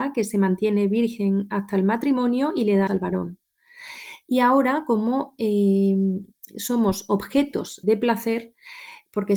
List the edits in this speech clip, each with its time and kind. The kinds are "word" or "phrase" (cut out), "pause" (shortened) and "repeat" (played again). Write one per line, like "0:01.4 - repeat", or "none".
0:02.9 - word
0:07.8 - word